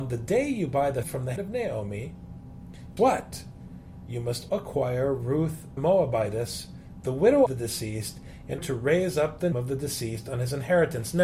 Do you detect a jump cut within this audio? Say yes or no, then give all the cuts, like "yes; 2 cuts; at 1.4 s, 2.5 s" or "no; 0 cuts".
yes; 8 cuts; at 1.0 s, 1.4 s, 3.0 s, 4.5 s, 5.8 s, 7.5 s, 8.6 s, 9.5 s